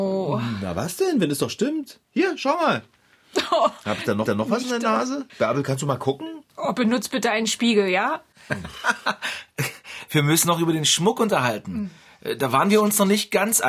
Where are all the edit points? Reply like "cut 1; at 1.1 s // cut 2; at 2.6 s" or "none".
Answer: cut 1; at 2.0 s // cut 2; at 4.3 s // cut 3; at 5.3 s // cut 4; at 10.4 s